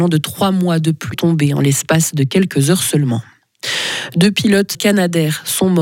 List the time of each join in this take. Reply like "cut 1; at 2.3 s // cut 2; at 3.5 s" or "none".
cut 1; at 1.1 s // cut 2; at 4.7 s